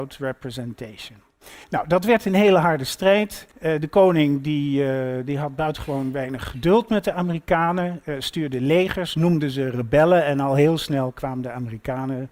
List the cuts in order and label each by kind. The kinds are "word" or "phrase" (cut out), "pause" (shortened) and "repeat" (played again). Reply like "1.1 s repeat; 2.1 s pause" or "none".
1.6 s pause; 3.5 s pause